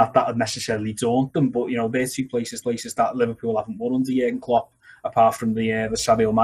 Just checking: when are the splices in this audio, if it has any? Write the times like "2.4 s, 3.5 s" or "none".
2.6 s

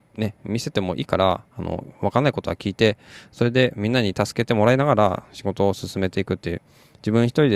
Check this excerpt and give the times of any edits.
1.5 s

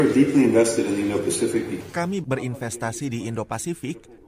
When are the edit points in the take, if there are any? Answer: 2.2 s

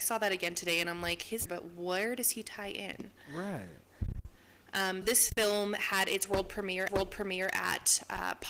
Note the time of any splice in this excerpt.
1.5 s, 5.0 s, 6.9 s

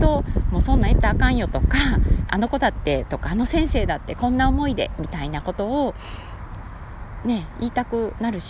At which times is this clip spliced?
2.3 s

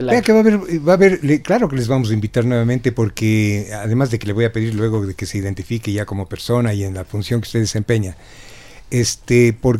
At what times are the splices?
none

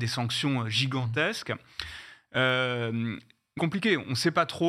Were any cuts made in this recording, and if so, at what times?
3.6 s

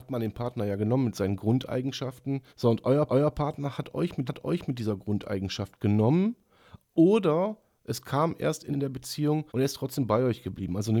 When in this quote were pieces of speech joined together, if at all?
2.5 s, 3.1 s, 4.3 s, 8.7 s, 9.5 s

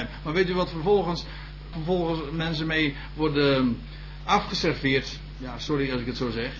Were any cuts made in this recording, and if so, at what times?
1.7 s

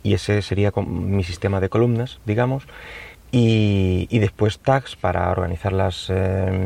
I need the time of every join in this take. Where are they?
3.1 s

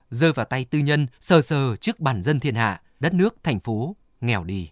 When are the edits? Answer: 1.1 s, 3.0 s

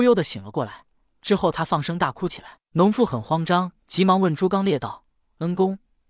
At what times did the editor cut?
3.8 s

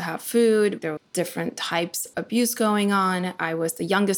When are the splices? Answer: 1.0 s, 2.1 s

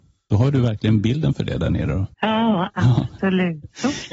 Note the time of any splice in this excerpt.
2.1 s

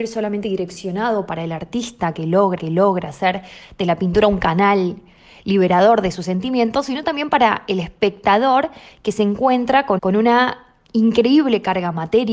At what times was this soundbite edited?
2.6 s, 10.0 s

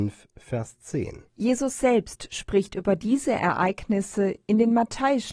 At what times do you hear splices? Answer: 1.3 s

